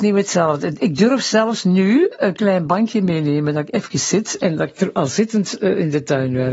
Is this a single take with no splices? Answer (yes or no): yes